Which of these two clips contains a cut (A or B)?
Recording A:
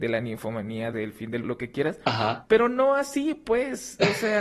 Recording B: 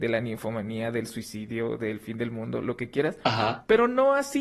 A